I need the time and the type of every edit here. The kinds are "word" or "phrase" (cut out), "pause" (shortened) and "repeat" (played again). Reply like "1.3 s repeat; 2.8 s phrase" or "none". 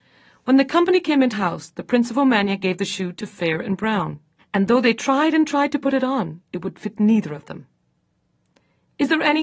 1.3 s word; 4.4 s pause; 6.4 s pause

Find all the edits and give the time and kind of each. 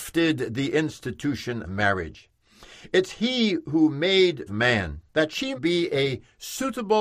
1.6 s word; 4.5 s phrase; 5.1 s pause; 5.5 s word

